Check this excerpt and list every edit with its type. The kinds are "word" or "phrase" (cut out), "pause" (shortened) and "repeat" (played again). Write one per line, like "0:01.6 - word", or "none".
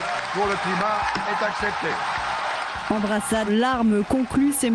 0:03.5 - word